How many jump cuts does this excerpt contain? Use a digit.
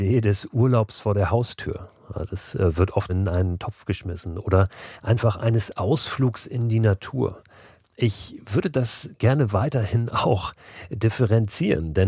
1